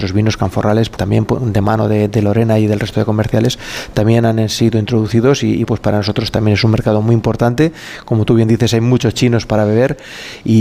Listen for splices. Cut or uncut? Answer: cut